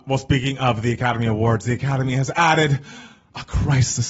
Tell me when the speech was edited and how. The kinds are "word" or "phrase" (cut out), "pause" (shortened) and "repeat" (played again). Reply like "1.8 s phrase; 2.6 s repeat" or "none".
none